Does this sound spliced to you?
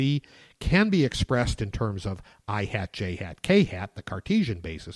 no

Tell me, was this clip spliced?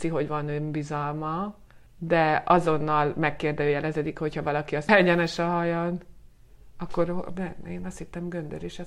yes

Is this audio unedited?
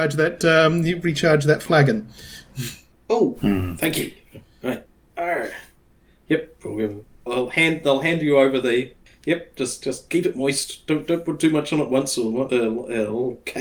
no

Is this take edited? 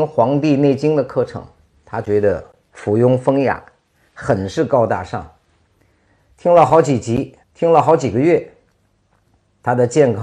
yes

